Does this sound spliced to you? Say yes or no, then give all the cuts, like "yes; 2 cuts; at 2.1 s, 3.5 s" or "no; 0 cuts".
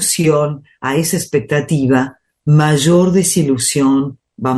no; 0 cuts